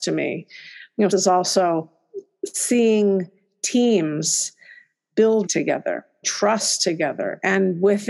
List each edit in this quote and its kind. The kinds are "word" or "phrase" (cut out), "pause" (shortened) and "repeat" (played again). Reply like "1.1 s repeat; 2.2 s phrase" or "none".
1.1 s word; 5.5 s word; 6.2 s word